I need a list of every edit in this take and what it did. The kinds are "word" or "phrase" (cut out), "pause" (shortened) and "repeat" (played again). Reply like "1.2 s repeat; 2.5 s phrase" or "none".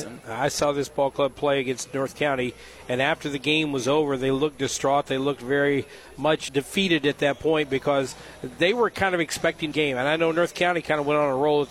6.5 s word; 9.7 s phrase